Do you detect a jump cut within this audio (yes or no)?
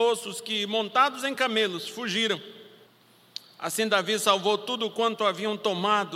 no